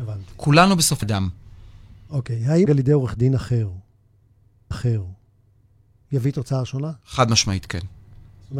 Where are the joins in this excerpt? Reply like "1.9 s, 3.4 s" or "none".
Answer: 1.0 s, 2.7 s, 4.7 s